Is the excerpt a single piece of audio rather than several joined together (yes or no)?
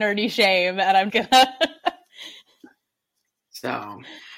no